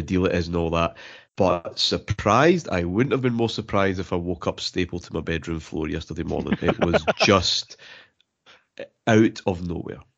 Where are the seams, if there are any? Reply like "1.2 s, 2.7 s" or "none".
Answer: 1.3 s